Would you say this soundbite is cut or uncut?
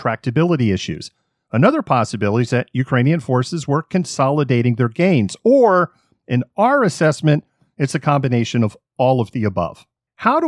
uncut